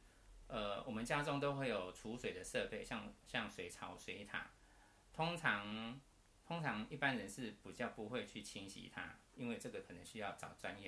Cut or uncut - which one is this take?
uncut